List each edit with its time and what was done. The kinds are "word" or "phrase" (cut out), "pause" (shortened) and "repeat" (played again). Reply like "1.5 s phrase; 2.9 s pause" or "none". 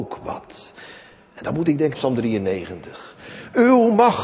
1.9 s word